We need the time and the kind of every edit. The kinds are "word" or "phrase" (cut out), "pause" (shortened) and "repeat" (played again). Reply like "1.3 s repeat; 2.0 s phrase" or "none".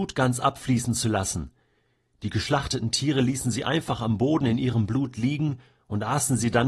none